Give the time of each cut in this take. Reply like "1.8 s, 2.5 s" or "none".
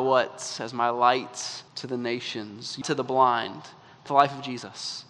1.7 s, 2.8 s, 4.1 s